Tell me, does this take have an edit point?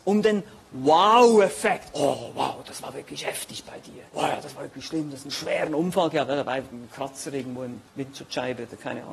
yes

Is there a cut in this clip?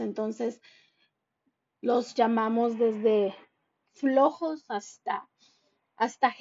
no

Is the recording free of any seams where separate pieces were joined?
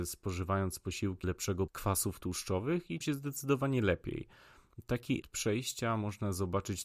no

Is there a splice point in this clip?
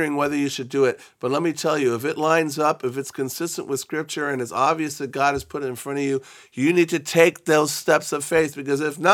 no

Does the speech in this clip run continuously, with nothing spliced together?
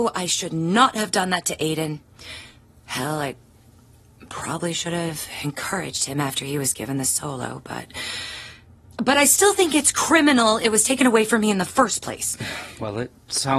yes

